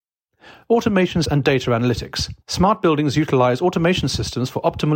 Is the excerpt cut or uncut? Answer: cut